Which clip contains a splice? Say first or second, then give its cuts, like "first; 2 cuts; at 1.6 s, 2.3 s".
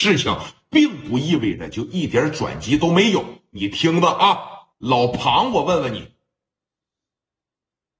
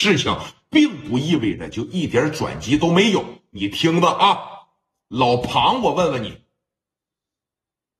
first; 1 cut; at 4.7 s